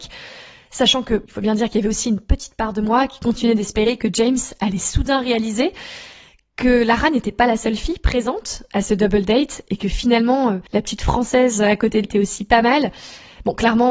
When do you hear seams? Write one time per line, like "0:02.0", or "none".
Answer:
0:01.2
0:12.0